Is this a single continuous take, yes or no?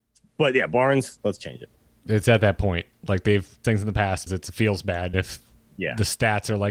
no